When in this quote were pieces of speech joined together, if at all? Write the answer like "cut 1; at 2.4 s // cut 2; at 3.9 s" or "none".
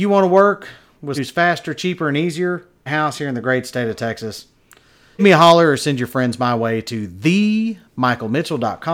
cut 1; at 1.2 s // cut 2; at 2.9 s // cut 3; at 5.2 s